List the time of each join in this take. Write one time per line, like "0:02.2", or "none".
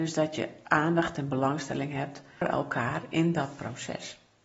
0:02.4